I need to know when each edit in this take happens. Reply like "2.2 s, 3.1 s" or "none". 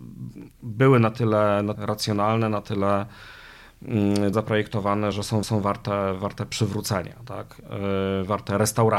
1.7 s, 4.3 s, 5.1 s, 5.4 s